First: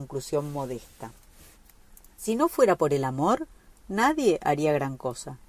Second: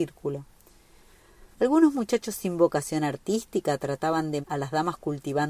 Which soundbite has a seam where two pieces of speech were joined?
second; 2 cuts; at 1.5 s, 4.4 s

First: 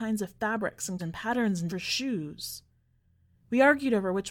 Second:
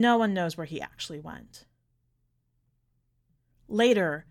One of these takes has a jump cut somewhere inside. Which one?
first; 2 cuts; at 1.0 s, 1.7 s

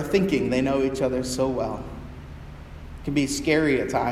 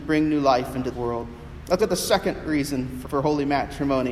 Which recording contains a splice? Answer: second; 3 cuts; at 0.9 s, 1.8 s, 3.0 s

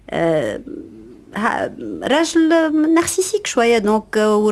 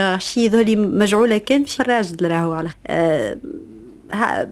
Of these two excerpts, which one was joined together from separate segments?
second; 2 cuts; at 1.8 s, 2.7 s

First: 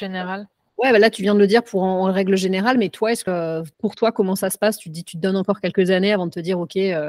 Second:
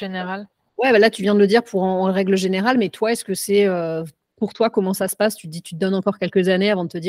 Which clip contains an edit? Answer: first; 2 cuts; at 3.3 s, 3.7 s

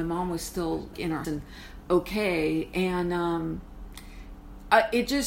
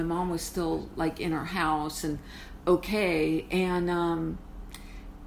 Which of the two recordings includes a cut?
first; 2 cuts; at 0.9 s, 1.2 s

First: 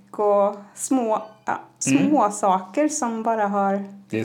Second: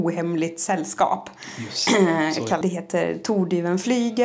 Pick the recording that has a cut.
second; 1 cut; at 2.6 s

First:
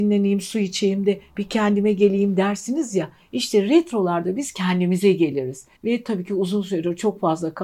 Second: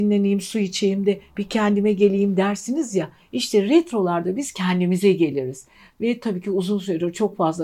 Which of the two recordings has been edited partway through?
first; 1 cut; at 5.7 s

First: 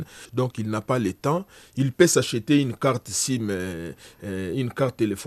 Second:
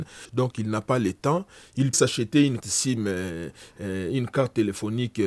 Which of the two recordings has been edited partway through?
second; 2 cuts; at 1.9 s, 2.6 s

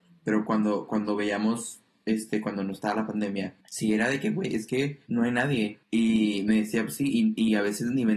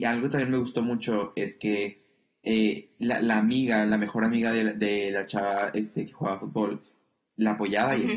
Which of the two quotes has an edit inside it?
first; 3 cuts; at 3.6 s, 5.1 s, 5.8 s

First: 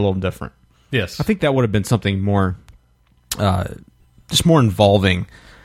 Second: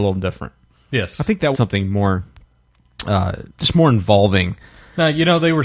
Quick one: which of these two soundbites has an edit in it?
second; 2 cuts; at 1.5 s, 3.5 s

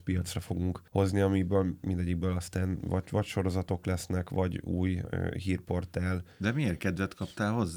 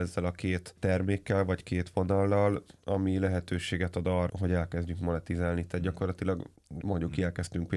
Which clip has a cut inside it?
second; 2 cuts; at 4.3 s, 6.8 s

